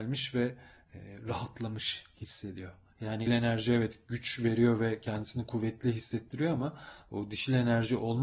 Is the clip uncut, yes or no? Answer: no